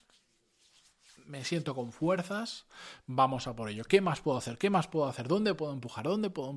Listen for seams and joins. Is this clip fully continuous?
yes; 0 cuts

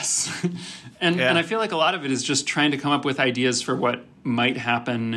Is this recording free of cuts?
yes; 0 cuts

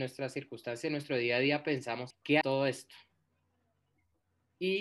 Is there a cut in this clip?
yes; 2 cuts; at 2.1 s, 2.4 s

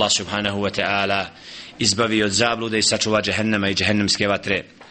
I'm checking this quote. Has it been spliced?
no; 0 cuts

